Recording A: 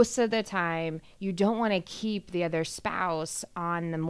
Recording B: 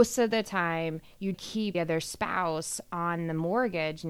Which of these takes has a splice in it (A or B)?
B